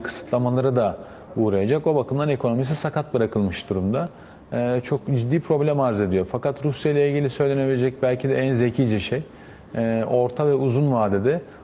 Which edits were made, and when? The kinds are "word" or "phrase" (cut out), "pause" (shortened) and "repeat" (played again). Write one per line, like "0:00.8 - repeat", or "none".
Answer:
none